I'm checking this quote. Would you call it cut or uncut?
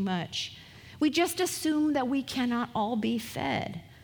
uncut